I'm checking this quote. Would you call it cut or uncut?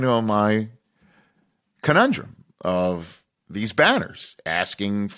uncut